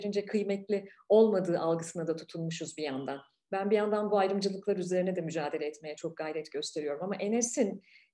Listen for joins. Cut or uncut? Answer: uncut